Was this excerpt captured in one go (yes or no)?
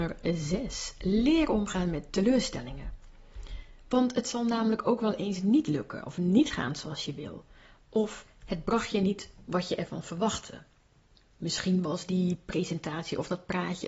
yes